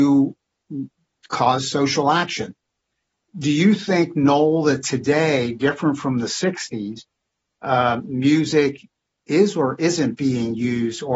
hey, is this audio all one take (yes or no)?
yes